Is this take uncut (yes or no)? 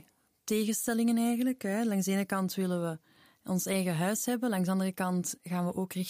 yes